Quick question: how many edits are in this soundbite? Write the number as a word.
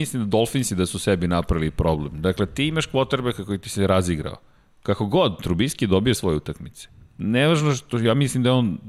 one